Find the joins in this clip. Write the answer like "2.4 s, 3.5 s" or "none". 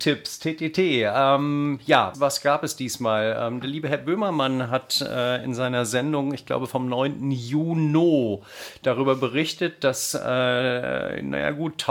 2.1 s